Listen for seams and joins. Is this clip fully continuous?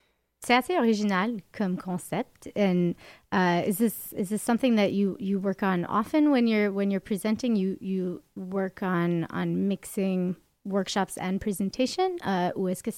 yes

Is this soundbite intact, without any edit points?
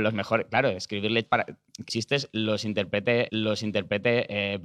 no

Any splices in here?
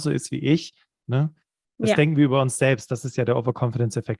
no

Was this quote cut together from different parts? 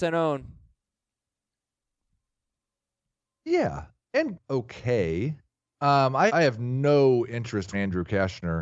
yes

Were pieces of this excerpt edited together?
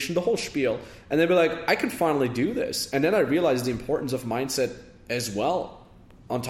no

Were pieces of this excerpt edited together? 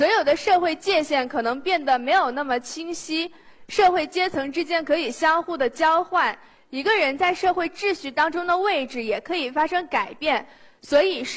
no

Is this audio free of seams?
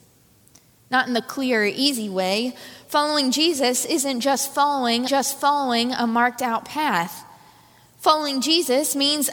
no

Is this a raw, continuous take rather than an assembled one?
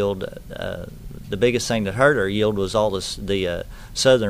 yes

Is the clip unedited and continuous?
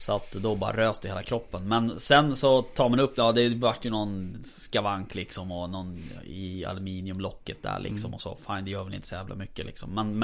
yes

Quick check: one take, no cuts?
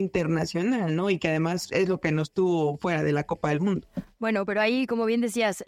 yes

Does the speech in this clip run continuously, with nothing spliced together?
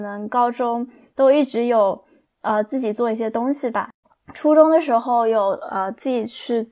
no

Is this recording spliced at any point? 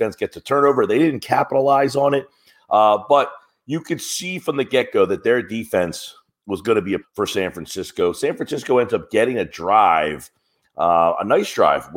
yes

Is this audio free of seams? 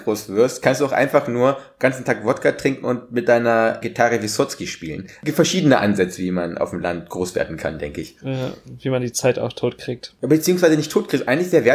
no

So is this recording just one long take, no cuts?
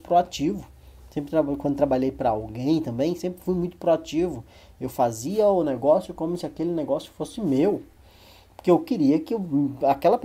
yes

